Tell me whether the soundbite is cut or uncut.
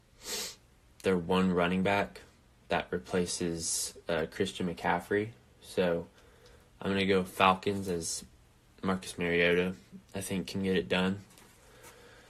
uncut